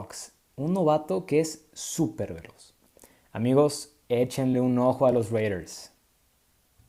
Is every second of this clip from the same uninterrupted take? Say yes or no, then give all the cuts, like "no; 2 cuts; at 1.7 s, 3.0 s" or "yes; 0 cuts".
yes; 0 cuts